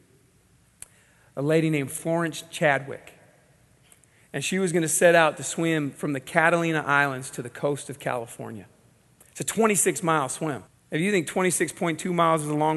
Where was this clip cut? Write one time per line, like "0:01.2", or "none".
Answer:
0:10.7